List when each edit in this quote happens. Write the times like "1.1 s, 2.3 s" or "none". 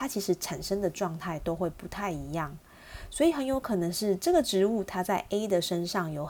none